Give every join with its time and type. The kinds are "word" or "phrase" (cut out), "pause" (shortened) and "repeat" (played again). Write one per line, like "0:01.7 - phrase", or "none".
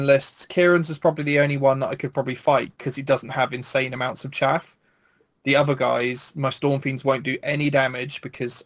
none